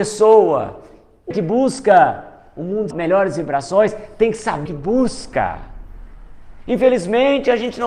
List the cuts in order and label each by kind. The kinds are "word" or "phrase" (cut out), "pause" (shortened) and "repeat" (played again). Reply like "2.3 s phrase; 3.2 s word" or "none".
1.3 s phrase; 2.9 s word; 4.7 s word

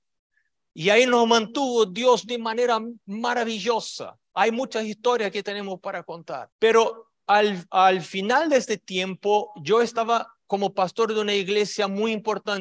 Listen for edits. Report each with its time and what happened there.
3.0 s pause; 6.5 s pause

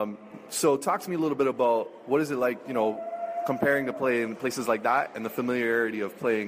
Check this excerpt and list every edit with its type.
none

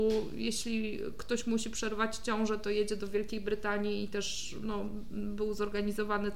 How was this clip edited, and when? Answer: none

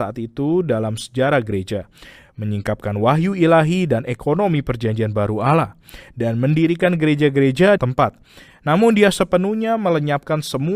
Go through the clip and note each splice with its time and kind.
7.8 s phrase

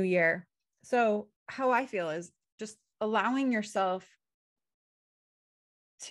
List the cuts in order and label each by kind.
1.4 s pause

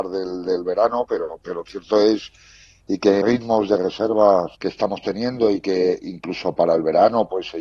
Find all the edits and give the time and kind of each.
3.2 s phrase; 4.5 s pause

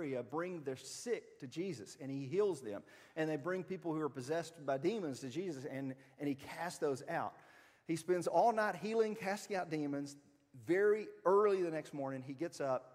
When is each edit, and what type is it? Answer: none

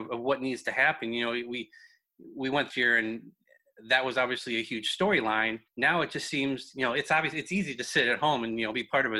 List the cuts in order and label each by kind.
2.7 s phrase; 5.7 s pause

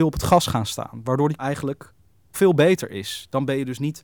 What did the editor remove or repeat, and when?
1.4 s word; 2.3 s word

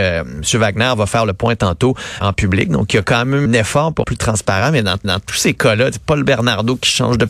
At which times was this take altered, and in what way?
2.2 s word; 3.5 s word; 4.0 s word; 5.0 s repeat

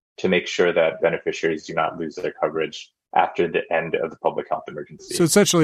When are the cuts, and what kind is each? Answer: 1.0 s phrase

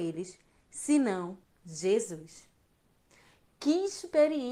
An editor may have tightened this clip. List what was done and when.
1.4 s pause

